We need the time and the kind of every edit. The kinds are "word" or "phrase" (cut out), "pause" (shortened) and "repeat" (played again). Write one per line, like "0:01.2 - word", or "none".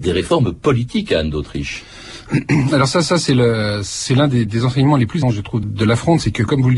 0:03.0 - repeat
0:04.5 - word
0:05.2 - word
0:05.6 - word